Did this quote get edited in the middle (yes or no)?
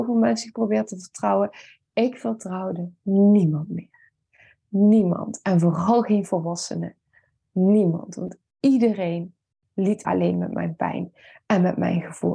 yes